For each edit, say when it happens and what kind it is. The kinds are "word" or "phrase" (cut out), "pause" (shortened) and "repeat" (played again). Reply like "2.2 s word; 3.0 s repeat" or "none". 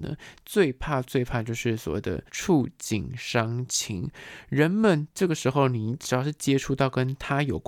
2.3 s pause